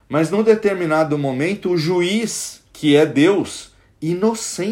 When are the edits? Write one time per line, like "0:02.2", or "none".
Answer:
none

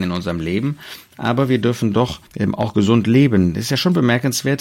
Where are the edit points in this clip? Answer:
0:02.3

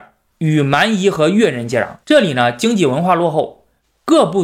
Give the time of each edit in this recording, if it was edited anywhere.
0:02.0

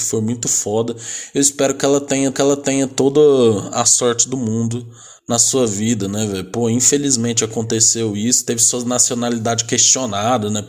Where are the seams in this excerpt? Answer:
0:02.3

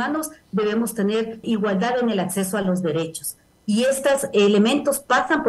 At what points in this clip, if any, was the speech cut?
0:01.4

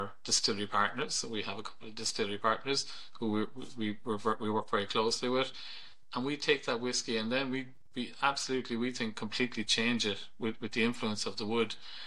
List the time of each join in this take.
none

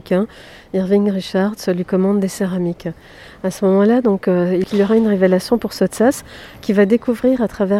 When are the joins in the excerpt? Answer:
none

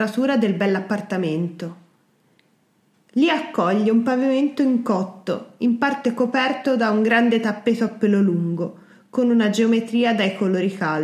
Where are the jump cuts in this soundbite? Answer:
none

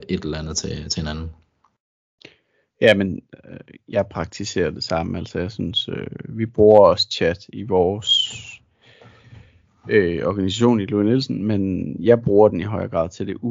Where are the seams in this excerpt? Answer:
none

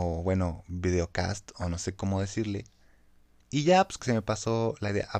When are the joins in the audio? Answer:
0:04.0

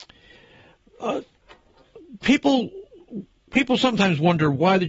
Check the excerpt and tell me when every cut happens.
none

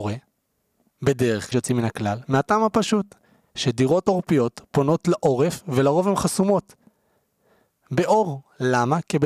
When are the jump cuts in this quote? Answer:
0:01.5

